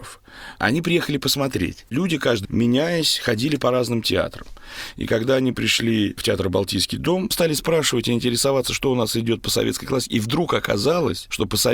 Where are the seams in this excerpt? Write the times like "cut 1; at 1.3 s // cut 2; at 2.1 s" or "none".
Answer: cut 1; at 2.4 s